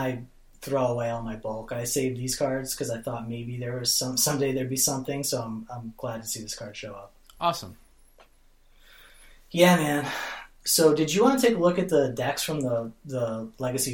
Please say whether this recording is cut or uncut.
uncut